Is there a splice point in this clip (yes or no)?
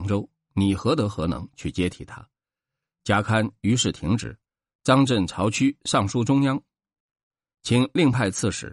no